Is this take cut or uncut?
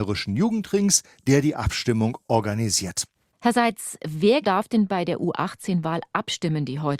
cut